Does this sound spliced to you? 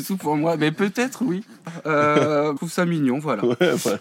yes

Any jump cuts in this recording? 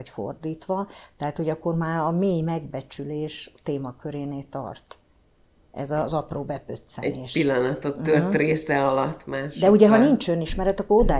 no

